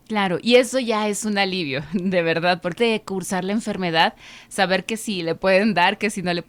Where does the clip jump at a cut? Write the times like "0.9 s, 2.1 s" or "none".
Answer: 2.8 s